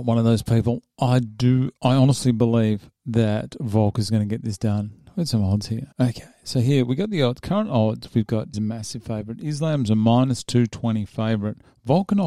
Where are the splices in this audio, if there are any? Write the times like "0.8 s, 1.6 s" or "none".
1.8 s, 5.9 s, 8.5 s